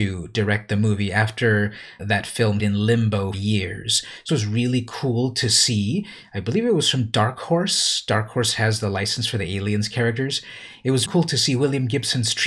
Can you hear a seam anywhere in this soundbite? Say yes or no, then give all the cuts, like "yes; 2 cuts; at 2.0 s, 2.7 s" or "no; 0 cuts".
yes; 5 cuts; at 2.0 s, 2.6 s, 3.3 s, 4.3 s, 11.1 s